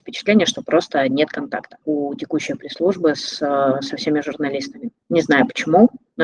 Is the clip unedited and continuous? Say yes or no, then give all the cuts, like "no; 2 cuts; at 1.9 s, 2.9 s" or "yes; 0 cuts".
no; 1 cut; at 1.8 s